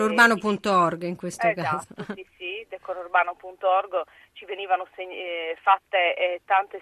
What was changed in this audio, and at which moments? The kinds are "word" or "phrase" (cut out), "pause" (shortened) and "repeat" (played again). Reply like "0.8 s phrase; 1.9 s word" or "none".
none

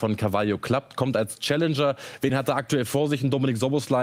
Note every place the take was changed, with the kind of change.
none

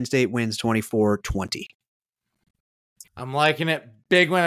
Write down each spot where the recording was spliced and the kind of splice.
1.2 s word; 3.1 s pause

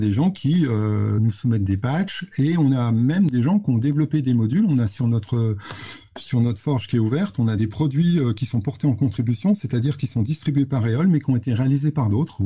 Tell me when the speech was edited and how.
1.2 s word; 7.6 s word

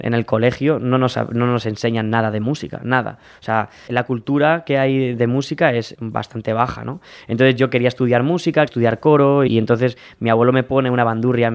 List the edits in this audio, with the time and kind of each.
3.9 s word; 5.1 s word; 5.9 s word; 8.7 s word; 9.5 s word

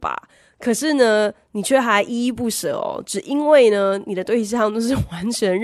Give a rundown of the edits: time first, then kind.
none

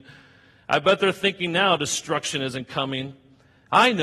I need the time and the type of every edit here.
none

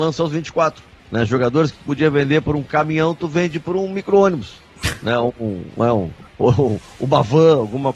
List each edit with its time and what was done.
1.0 s pause; 6.3 s pause

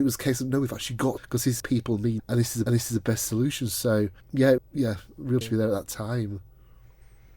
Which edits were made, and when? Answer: 1.2 s phrase; 1.6 s phrase; 2.2 s word; 2.7 s repeat; 4.2 s pause; 4.6 s word; 5.4 s word

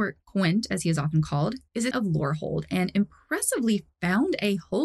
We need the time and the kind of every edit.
1.9 s word

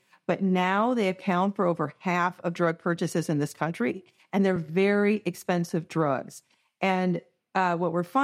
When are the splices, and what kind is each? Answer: none

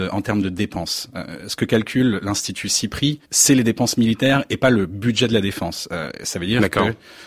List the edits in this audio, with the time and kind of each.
3.2 s pause

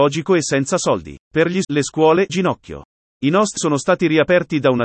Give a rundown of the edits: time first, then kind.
1.2 s pause; 1.6 s word; 2.3 s phrase; 3.6 s word

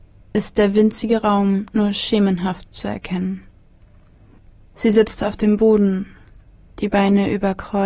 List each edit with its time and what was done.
none

